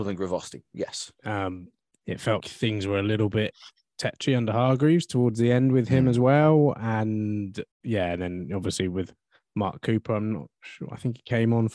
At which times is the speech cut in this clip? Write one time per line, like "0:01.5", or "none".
0:01.9
0:02.4
0:07.7

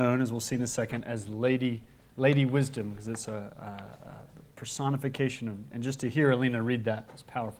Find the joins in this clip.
none

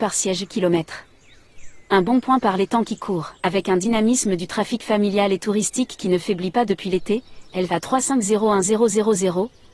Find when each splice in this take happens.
0:03.4

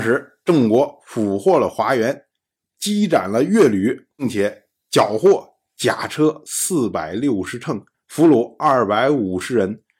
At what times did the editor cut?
0:07.9

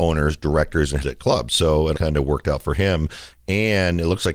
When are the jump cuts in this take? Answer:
0:01.0
0:01.9

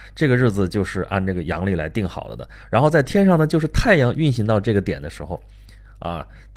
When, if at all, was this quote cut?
none

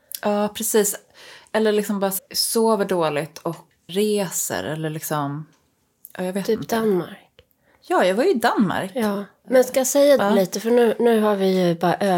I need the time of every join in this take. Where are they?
0:02.2
0:03.9
0:10.2

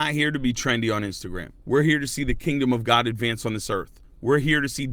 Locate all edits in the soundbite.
0:01.6

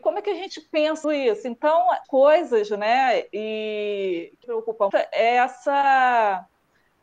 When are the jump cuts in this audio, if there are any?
0:01.0
0:02.0
0:04.4
0:04.9

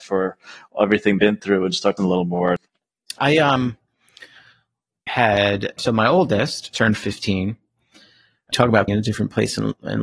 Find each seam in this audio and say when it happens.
0:01.2
0:02.0
0:03.2
0:05.1
0:05.8
0:06.7
0:08.5
0:08.9

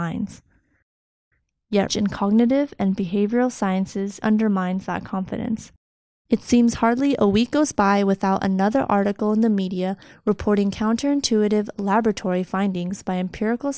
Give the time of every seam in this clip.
0:01.9
0:04.2

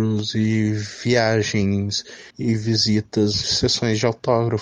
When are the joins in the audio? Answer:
0:02.3
0:03.4

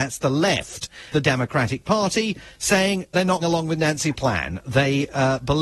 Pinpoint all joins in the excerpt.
0:01.1
0:03.4
0:04.1

